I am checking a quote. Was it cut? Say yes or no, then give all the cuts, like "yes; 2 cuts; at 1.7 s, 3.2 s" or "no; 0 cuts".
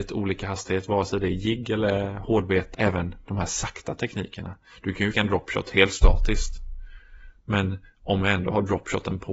yes; 2 cuts; at 2.7 s, 5.1 s